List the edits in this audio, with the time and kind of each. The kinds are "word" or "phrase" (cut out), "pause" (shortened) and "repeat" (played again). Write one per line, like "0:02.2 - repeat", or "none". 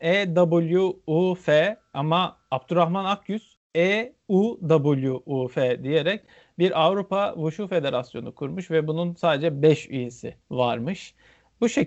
0:10.4 - pause